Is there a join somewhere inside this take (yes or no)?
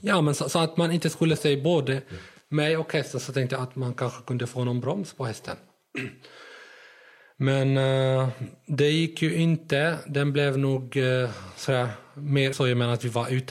yes